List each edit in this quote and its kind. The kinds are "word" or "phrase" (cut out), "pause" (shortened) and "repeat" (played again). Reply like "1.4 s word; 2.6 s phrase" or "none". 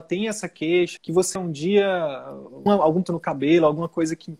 1.0 s word; 1.4 s word; 2.7 s word; 3.0 s word